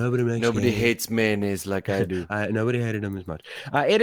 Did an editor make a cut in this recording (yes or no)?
no